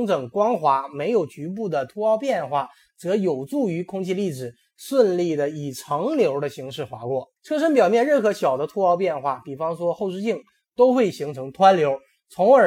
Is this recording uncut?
no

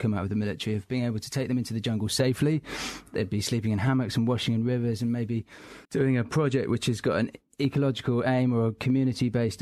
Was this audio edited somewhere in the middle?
yes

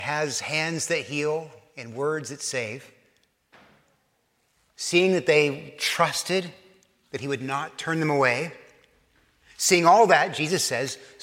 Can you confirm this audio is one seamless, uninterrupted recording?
yes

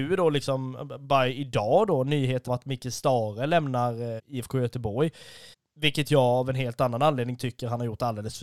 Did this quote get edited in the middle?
yes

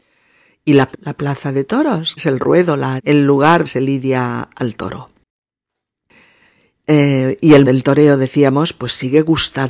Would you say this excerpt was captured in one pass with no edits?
no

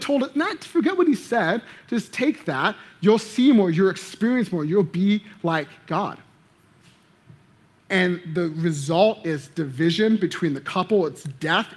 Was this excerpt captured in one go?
yes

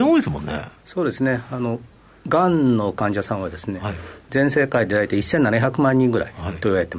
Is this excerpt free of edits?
yes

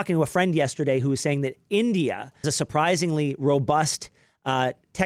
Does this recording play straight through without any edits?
no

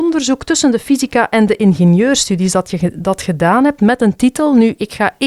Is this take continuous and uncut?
yes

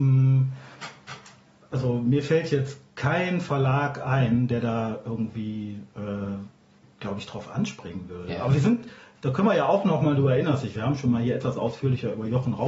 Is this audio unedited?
yes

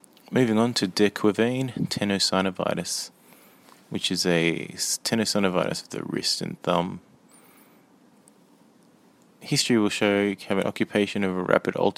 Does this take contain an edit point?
no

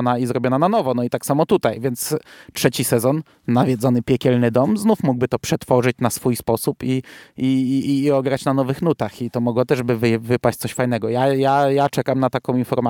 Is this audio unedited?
yes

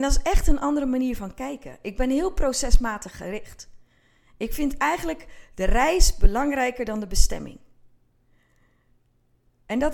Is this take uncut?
yes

